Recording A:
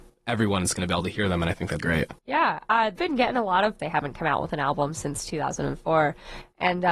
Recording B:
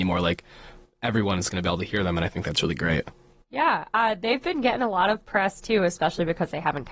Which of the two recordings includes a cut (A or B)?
A